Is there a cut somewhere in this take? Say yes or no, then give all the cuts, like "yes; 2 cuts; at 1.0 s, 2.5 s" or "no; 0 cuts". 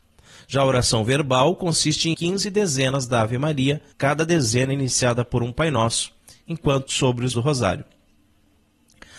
yes; 4 cuts; at 2.1 s, 3.9 s, 6.9 s, 7.3 s